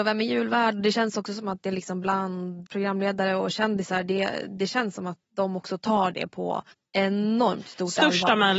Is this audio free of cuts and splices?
no; 2 cuts; at 2.7 s, 6.7 s

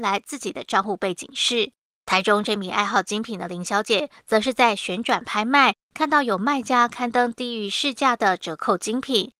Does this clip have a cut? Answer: no; 0 cuts

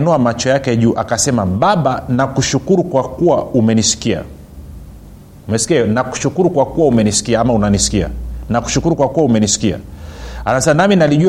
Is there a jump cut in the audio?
no; 0 cuts

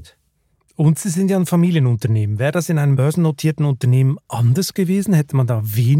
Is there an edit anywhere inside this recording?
no; 0 cuts

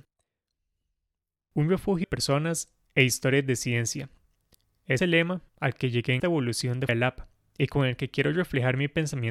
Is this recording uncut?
no; 5 cuts; at 2.0 s, 5.0 s, 5.5 s, 6.2 s, 6.9 s

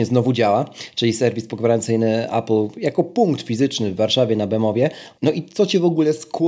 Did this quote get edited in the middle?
no; 0 cuts

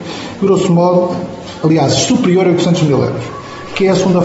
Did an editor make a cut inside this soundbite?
no; 0 cuts

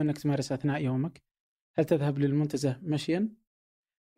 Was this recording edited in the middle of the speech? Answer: no; 0 cuts

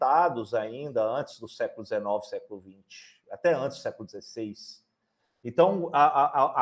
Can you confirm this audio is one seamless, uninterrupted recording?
yes; 0 cuts

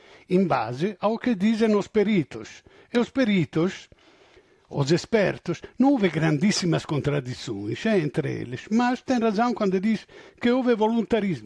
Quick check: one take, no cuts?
yes; 0 cuts

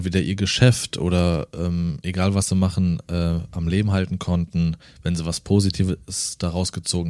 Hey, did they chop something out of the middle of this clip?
no; 0 cuts

